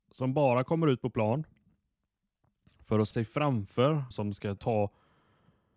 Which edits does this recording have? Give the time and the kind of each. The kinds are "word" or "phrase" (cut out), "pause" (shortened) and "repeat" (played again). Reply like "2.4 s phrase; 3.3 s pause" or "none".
3.1 s word; 4.1 s word; 4.6 s word